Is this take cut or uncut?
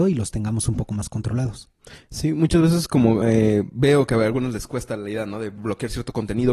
uncut